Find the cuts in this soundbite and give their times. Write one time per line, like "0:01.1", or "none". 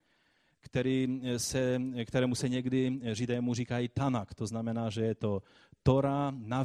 none